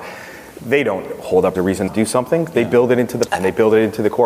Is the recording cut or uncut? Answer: cut